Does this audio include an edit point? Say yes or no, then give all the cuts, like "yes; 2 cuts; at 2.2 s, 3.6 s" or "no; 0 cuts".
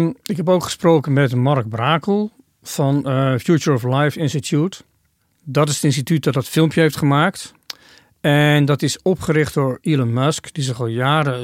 no; 0 cuts